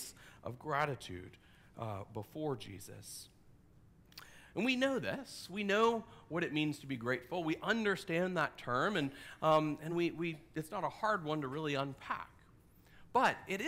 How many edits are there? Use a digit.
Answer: 0